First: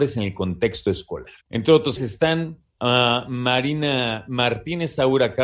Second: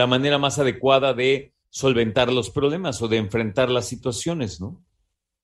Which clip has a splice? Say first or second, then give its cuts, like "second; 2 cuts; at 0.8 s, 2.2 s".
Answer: first; 3 cuts; at 1.4 s, 2.0 s, 2.7 s